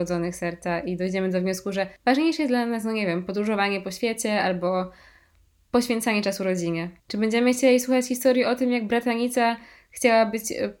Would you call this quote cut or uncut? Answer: cut